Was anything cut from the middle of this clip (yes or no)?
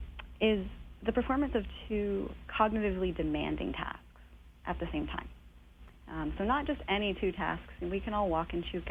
no